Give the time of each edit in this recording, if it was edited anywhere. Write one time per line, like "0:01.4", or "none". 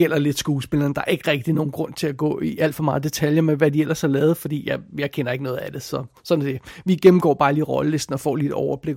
none